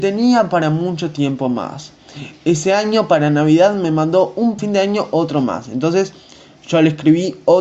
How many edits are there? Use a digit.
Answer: 1